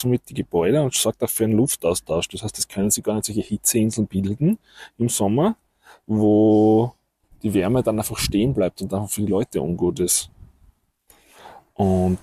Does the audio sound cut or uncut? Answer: uncut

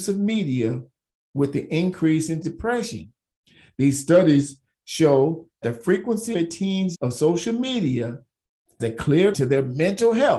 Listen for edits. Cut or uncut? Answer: cut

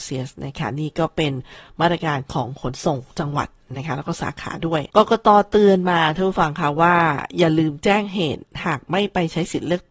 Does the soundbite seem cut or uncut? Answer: cut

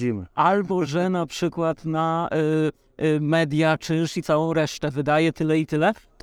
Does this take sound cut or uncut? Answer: uncut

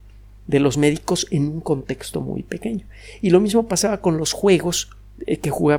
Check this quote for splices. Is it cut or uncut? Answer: uncut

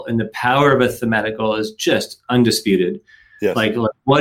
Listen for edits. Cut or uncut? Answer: uncut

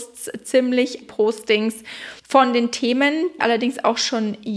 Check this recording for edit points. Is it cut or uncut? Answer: cut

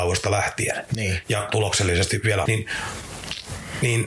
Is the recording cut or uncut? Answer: cut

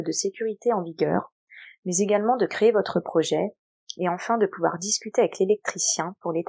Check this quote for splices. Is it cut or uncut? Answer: uncut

